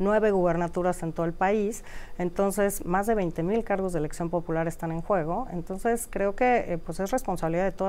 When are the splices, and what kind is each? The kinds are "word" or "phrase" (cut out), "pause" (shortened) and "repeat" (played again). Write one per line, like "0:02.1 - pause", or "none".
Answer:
none

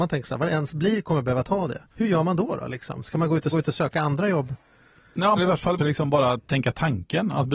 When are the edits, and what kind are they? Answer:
0:01.9 - pause
0:03.5 - repeat
0:05.4 - phrase
0:05.8 - phrase

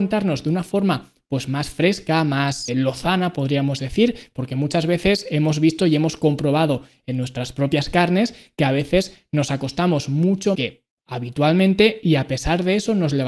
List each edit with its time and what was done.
0:02.7 - word
0:10.5 - phrase

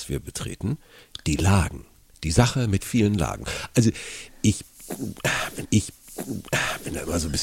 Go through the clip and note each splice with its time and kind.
0:02.8 - word
0:05.6 - repeat

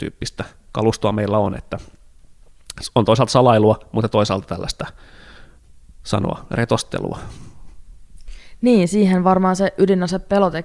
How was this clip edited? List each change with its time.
0:06.0 - phrase

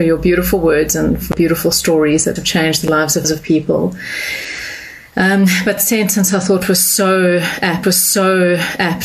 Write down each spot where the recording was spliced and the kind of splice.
0:01.3 - word
0:02.4 - word
0:03.2 - word
0:05.8 - word
0:07.8 - repeat

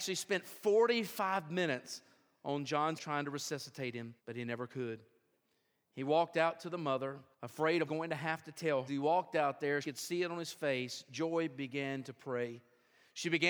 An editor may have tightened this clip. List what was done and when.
0:03.0 - word
0:04.2 - pause
0:07.3 - pause
0:07.9 - phrase
0:08.9 - phrase
0:09.8 - word

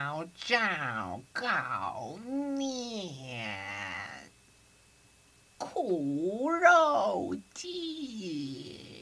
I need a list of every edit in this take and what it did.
none

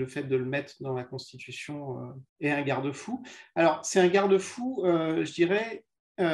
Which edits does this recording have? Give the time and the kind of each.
0:02.3 - pause

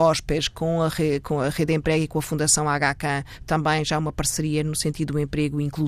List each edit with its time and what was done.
none

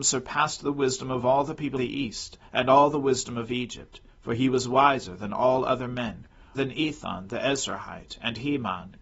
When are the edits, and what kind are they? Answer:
0:01.8 - word
0:04.1 - pause
0:06.5 - word

